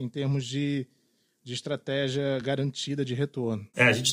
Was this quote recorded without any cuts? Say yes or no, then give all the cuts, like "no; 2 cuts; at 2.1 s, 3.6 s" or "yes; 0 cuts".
yes; 0 cuts